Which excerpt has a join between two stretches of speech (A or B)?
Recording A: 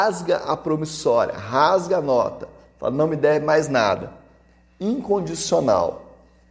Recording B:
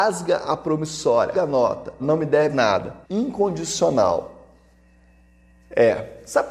B